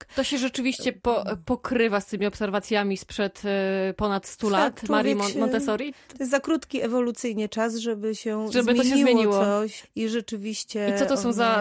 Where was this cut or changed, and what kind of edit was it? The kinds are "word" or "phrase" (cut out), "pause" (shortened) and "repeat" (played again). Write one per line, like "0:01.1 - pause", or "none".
none